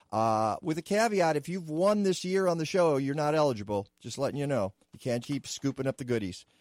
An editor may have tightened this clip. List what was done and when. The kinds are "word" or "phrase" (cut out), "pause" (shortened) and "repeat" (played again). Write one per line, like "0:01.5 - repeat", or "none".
0:04.8 - pause
0:05.2 - word